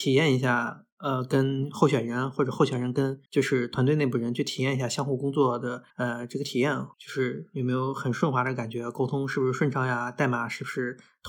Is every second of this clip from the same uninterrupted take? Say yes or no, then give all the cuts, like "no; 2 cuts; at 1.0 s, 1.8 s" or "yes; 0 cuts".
no; 3 cuts; at 3.2 s, 5.9 s, 6.9 s